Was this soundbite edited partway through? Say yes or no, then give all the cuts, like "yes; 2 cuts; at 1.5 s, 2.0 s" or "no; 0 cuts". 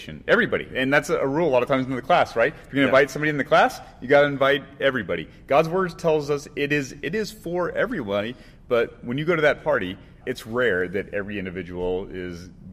yes; 1 cut; at 10.2 s